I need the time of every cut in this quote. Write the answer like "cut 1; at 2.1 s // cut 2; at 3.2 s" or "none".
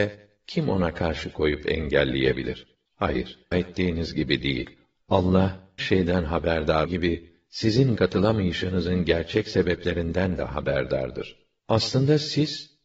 cut 1; at 3.5 s // cut 2; at 5.8 s // cut 3; at 6.9 s // cut 4; at 8.0 s

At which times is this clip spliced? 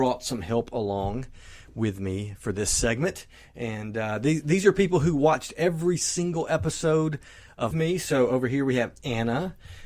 cut 1; at 7.7 s

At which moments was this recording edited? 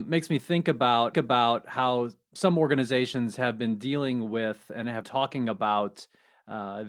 cut 1; at 1.1 s // cut 2; at 5.0 s

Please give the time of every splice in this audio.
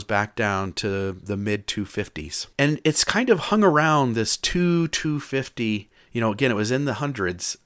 cut 1; at 2.5 s

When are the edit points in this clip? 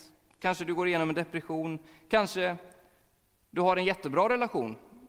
none

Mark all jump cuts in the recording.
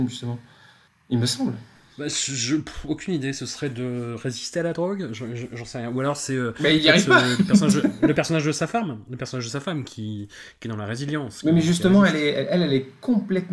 none

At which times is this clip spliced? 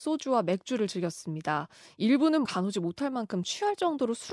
cut 1; at 2.5 s

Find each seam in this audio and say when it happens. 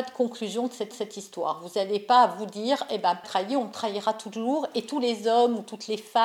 cut 1; at 0.9 s // cut 2; at 3.2 s

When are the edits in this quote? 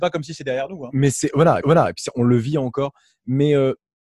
cut 1; at 1.6 s

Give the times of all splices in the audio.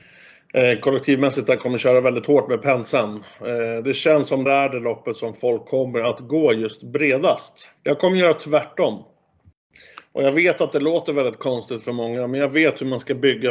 cut 1; at 4.5 s // cut 2; at 7.8 s

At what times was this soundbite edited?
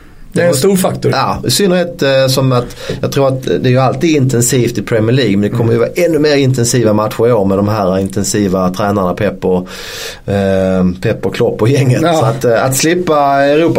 none

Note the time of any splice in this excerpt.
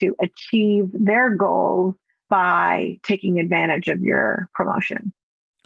none

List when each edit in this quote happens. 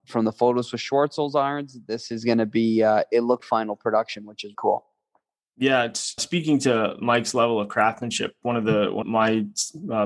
cut 1; at 3.4 s // cut 2; at 4.5 s // cut 3; at 6.2 s // cut 4; at 9.0 s

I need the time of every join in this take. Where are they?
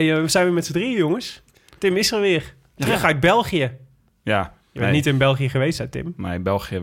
cut 1; at 4.6 s

